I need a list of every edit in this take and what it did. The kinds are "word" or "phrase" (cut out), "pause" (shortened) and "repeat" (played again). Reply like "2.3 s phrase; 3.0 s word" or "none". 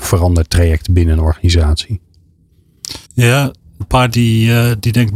3.0 s pause; 3.8 s word; 4.1 s word